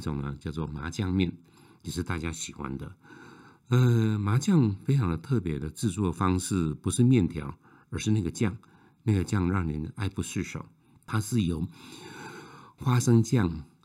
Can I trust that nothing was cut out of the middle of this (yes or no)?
yes